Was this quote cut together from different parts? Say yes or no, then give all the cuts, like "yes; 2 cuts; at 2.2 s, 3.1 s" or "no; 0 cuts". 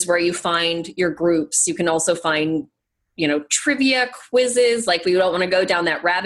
no; 0 cuts